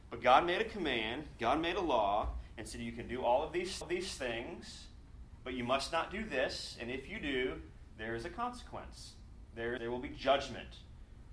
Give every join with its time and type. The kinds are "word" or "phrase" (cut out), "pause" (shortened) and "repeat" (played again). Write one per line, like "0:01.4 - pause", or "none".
0:03.8 - repeat
0:09.8 - word